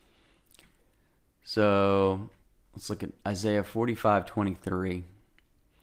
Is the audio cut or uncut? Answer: cut